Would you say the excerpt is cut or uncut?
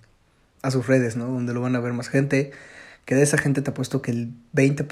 uncut